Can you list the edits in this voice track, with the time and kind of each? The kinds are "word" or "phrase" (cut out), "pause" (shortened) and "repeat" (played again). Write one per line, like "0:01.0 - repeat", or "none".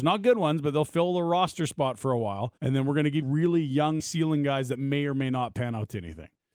0:02.6 - pause
0:03.2 - phrase
0:04.0 - word